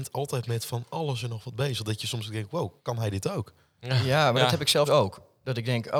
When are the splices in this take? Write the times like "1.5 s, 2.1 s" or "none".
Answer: 2.8 s, 4.9 s